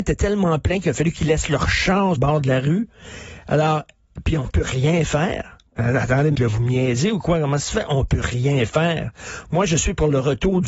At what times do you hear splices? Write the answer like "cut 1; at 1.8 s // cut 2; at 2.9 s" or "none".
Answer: cut 1; at 2.2 s // cut 2; at 5.7 s // cut 3; at 6.4 s